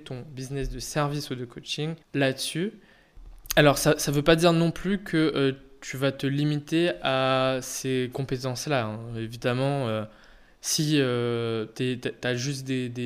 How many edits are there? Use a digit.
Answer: 1